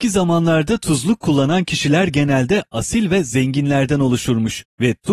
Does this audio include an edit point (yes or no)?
no